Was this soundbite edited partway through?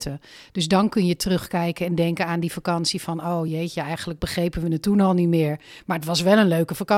no; 0 cuts

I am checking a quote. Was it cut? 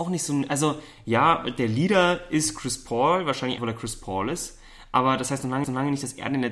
yes; 2 cuts; at 3.6 s, 5.6 s

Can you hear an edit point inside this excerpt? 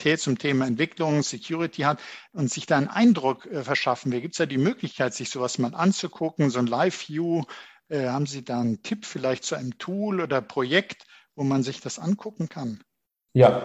no; 0 cuts

